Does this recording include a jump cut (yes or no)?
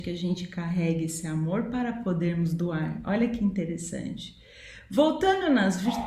no